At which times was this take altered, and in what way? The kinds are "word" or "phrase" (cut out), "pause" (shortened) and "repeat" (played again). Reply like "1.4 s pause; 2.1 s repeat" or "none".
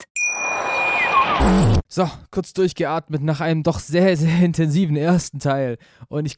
1.8 s pause